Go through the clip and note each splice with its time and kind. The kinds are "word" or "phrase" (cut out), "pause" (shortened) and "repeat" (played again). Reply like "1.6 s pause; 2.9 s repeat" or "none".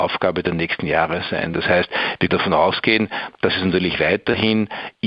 2.3 s word